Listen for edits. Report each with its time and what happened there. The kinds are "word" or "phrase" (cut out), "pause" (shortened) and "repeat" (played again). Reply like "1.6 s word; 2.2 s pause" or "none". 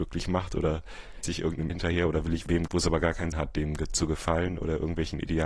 1.2 s word; 1.7 s word; 2.7 s word; 3.3 s word